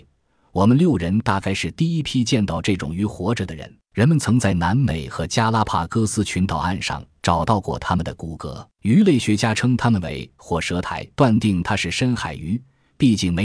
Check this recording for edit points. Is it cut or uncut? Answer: cut